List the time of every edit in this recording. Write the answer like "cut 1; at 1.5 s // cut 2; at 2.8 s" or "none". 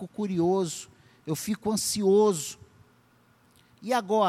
none

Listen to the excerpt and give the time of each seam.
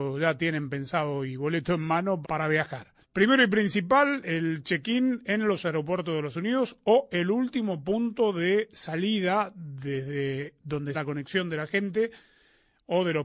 cut 1; at 2.2 s // cut 2; at 3.0 s // cut 3; at 6.3 s // cut 4; at 10.9 s

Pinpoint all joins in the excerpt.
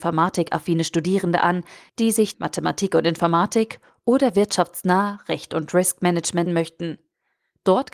cut 1; at 2.3 s // cut 2; at 6.5 s

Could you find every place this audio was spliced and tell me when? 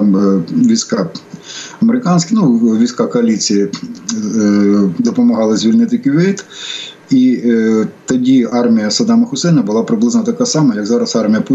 none

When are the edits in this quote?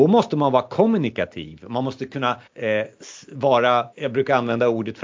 cut 1; at 2.5 s // cut 2; at 3.9 s

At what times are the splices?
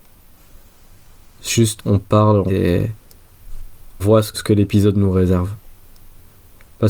cut 1; at 1.8 s // cut 2; at 2.5 s // cut 3; at 4.0 s // cut 4; at 4.3 s

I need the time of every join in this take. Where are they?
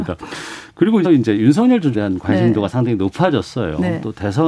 cut 1; at 1.0 s // cut 2; at 1.9 s

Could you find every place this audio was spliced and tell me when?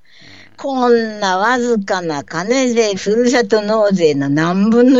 cut 1; at 2.9 s

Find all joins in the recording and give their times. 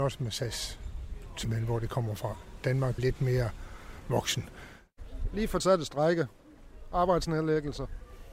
cut 1; at 1.4 s // cut 2; at 3.0 s // cut 3; at 5.6 s

